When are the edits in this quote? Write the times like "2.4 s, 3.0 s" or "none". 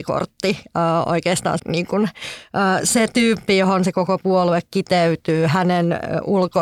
1.6 s